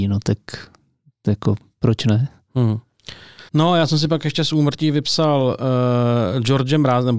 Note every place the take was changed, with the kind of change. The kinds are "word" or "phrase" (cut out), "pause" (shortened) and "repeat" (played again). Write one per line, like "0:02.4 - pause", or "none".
0:03.5 - pause

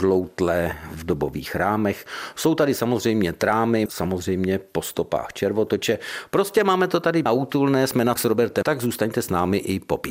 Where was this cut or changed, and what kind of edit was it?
0:03.9 - word
0:07.3 - word
0:08.2 - word
0:08.6 - word

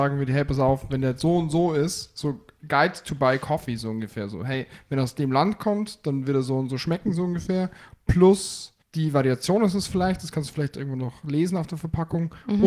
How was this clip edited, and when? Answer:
0:08.8 - pause

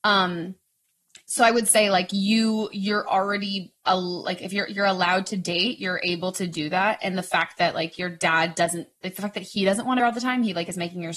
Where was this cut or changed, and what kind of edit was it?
0:10.0 - phrase

